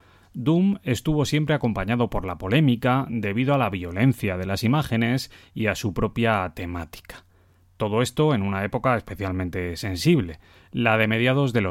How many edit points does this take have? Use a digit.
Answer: 0